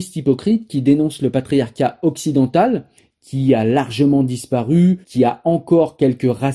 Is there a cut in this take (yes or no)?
yes